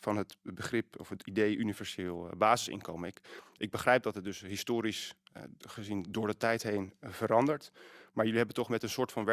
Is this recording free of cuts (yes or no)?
yes